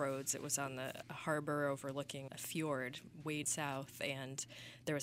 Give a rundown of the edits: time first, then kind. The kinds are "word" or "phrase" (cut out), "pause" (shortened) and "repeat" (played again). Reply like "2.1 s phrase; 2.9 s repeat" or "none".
1.0 s word; 2.3 s word; 3.4 s word